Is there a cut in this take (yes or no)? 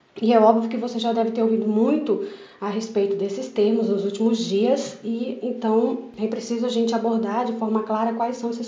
no